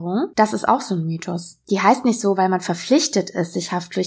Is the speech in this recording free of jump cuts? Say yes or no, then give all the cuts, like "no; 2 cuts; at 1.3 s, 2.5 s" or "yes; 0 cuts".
yes; 0 cuts